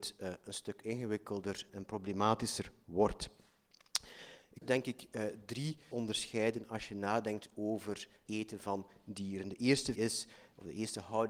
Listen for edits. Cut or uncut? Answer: cut